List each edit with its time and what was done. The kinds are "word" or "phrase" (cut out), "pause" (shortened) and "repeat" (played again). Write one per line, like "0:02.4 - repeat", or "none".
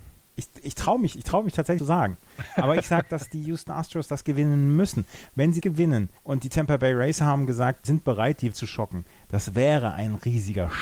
0:01.8 - phrase
0:05.6 - phrase
0:06.2 - pause
0:07.8 - word
0:08.5 - word